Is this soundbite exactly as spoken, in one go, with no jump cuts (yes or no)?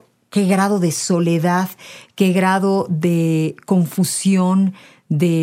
yes